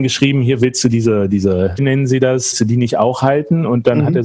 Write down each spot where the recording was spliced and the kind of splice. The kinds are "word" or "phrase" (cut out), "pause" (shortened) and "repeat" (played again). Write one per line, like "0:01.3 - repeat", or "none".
0:01.8 - word
0:02.5 - word